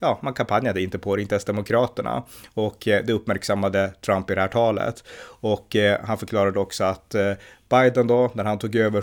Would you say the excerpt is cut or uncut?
uncut